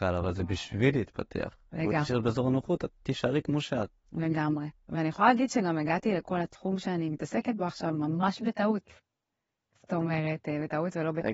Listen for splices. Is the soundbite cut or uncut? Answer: uncut